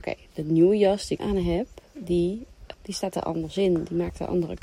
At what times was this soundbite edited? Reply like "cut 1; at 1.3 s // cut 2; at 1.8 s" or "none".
cut 1; at 1.2 s // cut 2; at 2.7 s